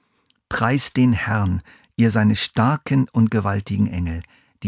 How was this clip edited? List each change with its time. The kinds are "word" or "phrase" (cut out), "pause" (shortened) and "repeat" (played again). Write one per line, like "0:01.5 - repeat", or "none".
none